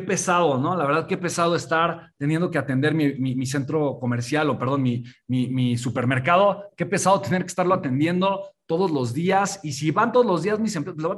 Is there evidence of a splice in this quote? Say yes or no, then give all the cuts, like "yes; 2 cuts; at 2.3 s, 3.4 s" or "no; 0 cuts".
no; 0 cuts